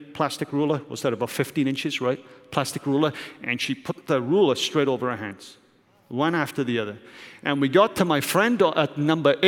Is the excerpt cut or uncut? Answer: uncut